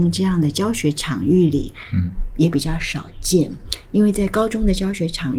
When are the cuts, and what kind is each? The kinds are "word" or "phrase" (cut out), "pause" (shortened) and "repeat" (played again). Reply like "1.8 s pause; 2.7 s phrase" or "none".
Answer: none